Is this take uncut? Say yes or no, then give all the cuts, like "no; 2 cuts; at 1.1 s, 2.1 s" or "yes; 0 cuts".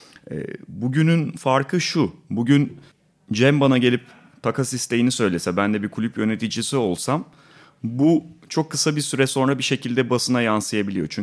yes; 0 cuts